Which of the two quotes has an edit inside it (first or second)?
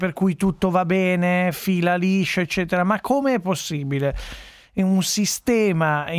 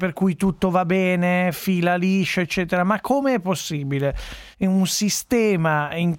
second